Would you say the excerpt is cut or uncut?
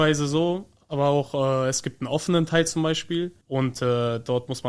cut